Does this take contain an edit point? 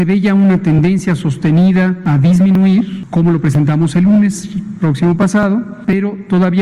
no; 0 cuts

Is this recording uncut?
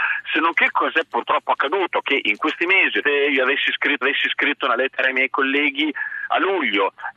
no; 2 cuts; at 3.0 s, 4.0 s

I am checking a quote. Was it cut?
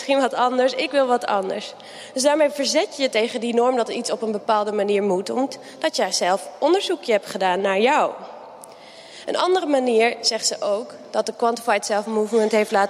no; 0 cuts

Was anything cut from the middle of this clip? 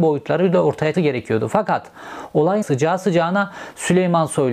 yes; 2 cuts; at 0.9 s, 2.6 s

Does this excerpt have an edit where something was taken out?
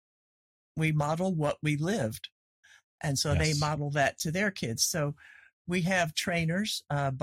no; 0 cuts

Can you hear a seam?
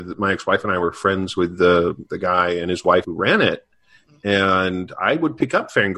yes; 2 cuts; at 2.1 s, 3.0 s

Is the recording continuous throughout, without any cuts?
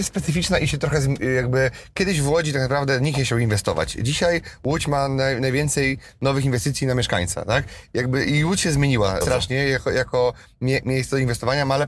no; 1 cut; at 9.2 s

